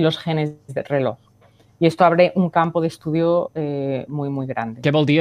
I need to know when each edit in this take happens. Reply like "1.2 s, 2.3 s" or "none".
none